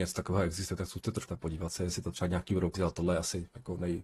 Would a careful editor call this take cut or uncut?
cut